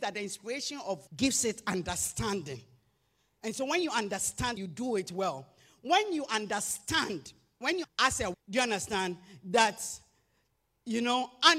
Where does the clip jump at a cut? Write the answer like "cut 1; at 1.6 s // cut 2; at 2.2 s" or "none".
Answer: cut 1; at 1.1 s // cut 2; at 4.6 s // cut 3; at 7.8 s // cut 4; at 8.3 s

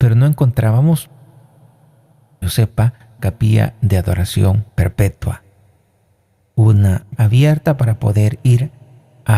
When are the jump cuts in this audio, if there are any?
cut 1; at 2.4 s // cut 2; at 3.2 s // cut 3; at 4.7 s // cut 4; at 7.2 s

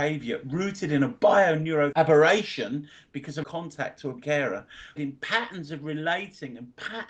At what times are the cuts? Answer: cut 1; at 1.9 s // cut 2; at 3.4 s // cut 3; at 4.2 s // cut 4; at 5.0 s

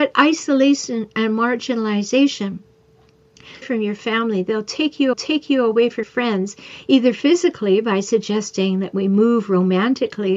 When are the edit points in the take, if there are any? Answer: cut 1; at 1.1 s // cut 2; at 3.6 s // cut 3; at 5.1 s // cut 4; at 6.0 s

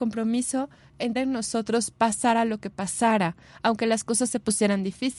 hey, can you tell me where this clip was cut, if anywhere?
cut 1; at 1.2 s

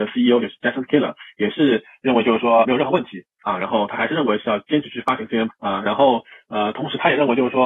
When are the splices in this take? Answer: cut 1; at 2.6 s // cut 2; at 5.5 s

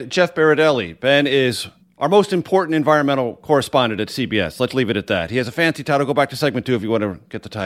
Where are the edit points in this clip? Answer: cut 1; at 1.8 s // cut 2; at 4.7 s

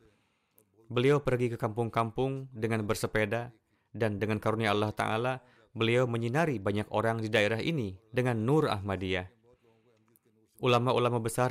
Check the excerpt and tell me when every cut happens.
none

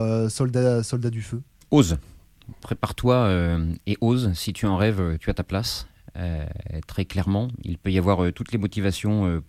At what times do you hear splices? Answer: none

